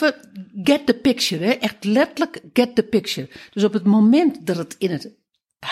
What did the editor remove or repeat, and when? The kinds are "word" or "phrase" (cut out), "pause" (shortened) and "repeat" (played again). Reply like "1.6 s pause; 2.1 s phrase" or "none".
none